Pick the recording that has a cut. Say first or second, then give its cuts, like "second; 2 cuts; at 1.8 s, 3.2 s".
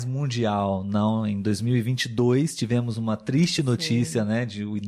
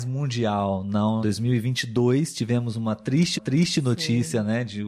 second; 2 cuts; at 1.2 s, 3.4 s